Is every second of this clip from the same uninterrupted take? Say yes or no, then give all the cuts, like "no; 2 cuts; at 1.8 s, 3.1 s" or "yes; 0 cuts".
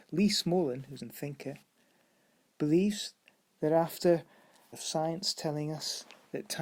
no; 2 cuts; at 1.0 s, 4.7 s